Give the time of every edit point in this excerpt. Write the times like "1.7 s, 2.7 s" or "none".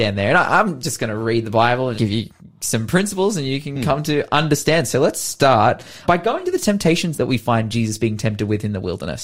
2.0 s, 6.0 s, 7.1 s

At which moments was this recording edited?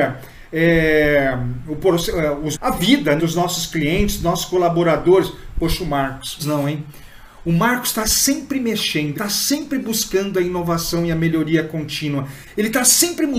2.5 s, 3.2 s, 6.4 s, 9.1 s

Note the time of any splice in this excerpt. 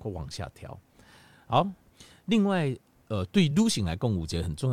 none

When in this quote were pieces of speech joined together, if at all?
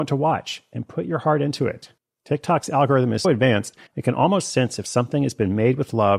2.0 s, 3.2 s, 3.9 s

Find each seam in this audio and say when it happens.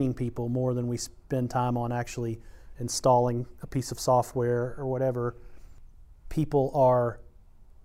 none

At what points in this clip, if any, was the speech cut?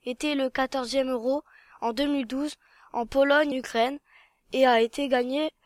3.5 s

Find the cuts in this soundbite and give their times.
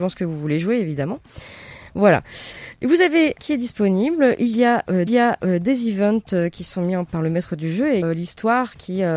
3.4 s, 5.1 s, 7.1 s, 8.0 s

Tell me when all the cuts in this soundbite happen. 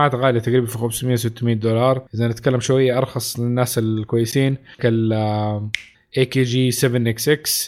2.1 s, 4.8 s

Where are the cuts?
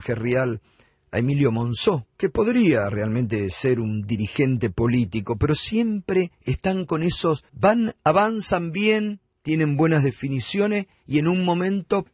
2.1 s, 6.3 s, 7.5 s

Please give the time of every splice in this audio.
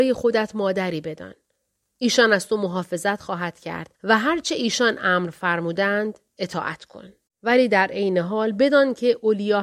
3.9 s, 7.3 s

